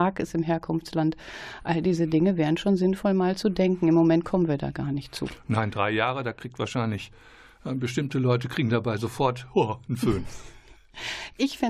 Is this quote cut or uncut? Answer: uncut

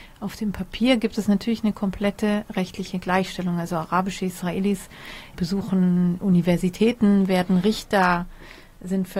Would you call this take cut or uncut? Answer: uncut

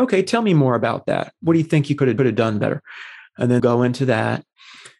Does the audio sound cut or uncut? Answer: cut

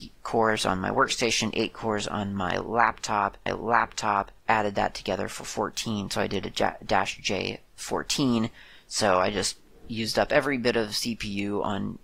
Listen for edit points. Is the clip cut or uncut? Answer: cut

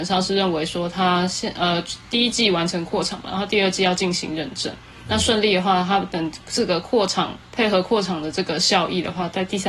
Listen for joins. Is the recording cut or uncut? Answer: cut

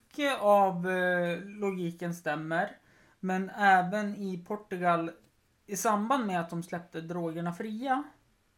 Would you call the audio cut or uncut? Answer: uncut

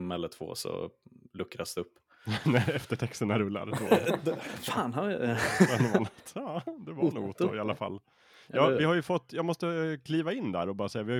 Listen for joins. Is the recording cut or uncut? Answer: uncut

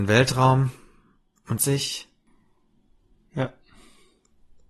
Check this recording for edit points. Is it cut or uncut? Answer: cut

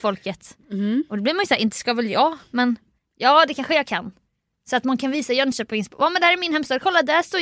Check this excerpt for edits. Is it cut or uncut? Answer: uncut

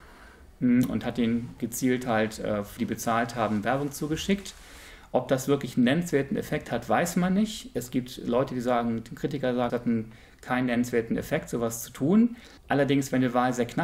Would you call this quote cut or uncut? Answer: cut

